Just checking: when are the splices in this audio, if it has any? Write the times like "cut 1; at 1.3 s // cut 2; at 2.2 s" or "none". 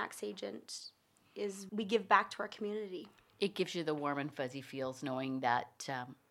cut 1; at 1.7 s